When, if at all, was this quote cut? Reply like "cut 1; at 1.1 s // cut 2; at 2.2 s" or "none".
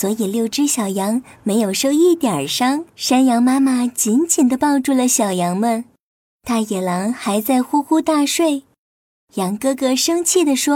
cut 1; at 2.9 s